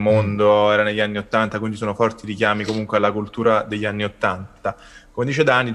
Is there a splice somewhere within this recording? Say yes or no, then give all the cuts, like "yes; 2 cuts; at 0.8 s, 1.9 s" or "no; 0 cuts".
no; 0 cuts